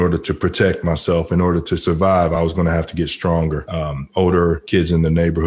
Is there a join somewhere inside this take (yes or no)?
no